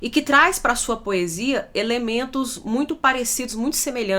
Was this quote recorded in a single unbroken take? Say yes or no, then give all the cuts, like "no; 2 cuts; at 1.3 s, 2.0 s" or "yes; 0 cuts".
yes; 0 cuts